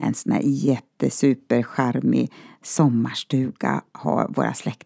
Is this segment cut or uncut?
uncut